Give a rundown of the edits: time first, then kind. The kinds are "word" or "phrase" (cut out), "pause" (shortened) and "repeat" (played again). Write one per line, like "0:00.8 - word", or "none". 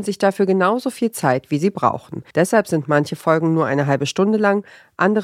0:02.3 - pause